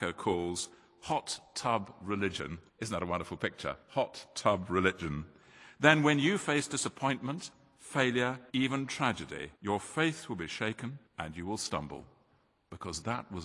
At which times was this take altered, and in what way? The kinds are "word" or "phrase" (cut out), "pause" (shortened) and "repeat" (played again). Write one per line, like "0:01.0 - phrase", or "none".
0:02.7 - pause
0:03.8 - pause
0:08.5 - pause
0:09.6 - pause
0:11.1 - pause

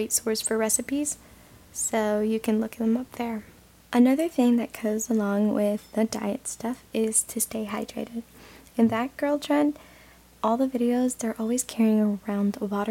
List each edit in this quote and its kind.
none

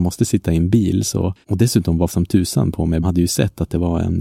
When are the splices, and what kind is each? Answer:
0:01.4 - pause
0:02.1 - phrase
0:03.0 - phrase

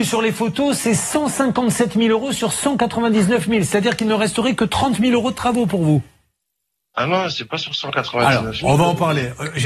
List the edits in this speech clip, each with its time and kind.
none

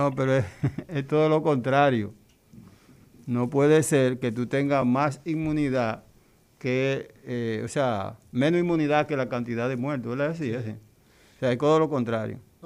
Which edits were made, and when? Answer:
none

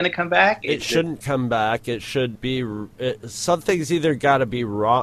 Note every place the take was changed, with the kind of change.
none

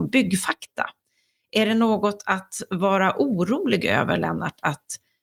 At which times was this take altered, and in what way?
none

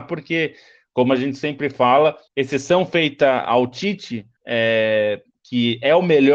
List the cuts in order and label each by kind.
0:02.3 - pause
0:04.4 - pause

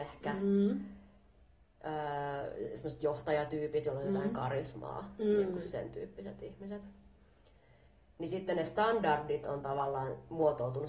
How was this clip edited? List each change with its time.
none

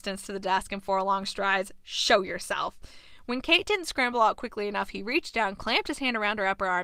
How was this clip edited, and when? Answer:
none

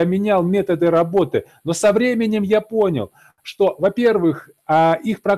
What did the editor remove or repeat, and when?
none

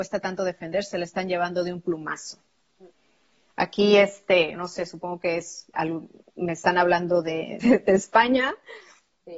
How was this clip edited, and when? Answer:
0:04.6 - word
0:05.7 - word
0:07.6 - word

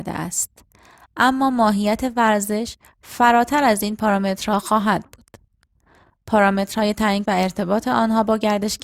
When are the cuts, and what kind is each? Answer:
0:07.2 - phrase

